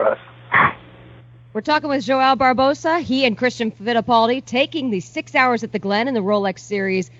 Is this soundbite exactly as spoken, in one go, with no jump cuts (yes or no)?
yes